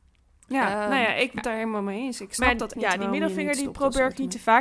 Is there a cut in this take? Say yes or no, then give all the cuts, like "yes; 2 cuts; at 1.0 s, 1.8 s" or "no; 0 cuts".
yes; 3 cuts; at 1.4 s, 2.3 s, 2.7 s